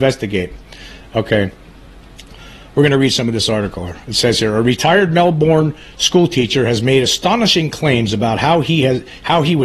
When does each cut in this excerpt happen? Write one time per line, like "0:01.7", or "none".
none